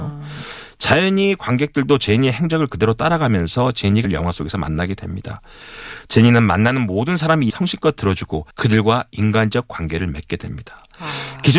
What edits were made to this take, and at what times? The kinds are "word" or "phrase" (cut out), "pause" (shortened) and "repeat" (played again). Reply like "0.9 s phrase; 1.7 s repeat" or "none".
4.0 s phrase; 7.5 s word; 8.5 s pause